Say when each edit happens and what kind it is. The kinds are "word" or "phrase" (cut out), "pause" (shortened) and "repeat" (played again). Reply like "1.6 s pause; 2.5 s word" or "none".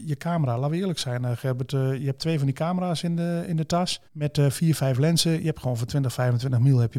4.1 s pause